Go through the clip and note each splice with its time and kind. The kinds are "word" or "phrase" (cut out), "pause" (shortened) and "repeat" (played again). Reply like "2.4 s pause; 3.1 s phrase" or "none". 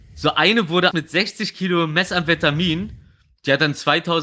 0.9 s word